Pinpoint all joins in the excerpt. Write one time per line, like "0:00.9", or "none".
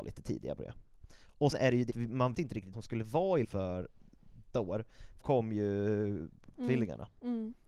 0:01.5
0:01.9
0:02.3
0:02.7
0:03.4
0:04.5
0:05.2
0:06.5